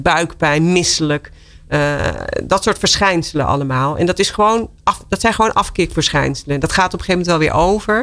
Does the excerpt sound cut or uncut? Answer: uncut